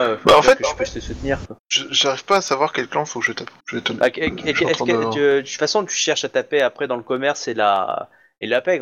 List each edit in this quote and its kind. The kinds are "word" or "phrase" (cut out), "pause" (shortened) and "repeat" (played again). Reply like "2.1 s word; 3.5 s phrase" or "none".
1.6 s pause; 3.6 s pause